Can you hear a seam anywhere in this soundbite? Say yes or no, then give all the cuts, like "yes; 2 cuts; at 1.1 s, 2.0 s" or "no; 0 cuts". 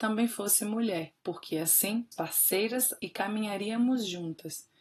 yes; 3 cuts; at 1.2 s, 2.1 s, 3.0 s